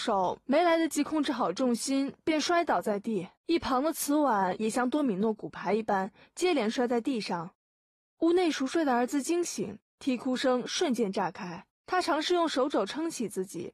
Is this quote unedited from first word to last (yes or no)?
no